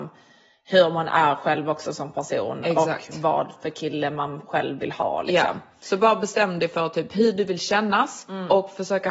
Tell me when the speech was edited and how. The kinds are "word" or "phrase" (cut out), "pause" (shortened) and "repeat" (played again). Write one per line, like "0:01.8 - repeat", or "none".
none